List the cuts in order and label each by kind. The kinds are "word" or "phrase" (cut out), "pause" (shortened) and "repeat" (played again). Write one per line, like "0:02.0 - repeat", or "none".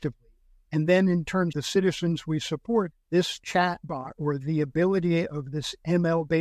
0:01.5 - word
0:02.9 - word